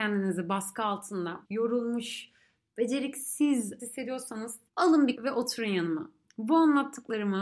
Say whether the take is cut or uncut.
cut